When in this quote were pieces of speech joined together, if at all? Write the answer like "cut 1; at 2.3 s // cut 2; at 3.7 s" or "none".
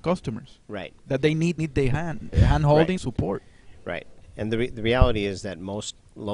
cut 1; at 1.6 s // cut 2; at 2.3 s // cut 3; at 3.0 s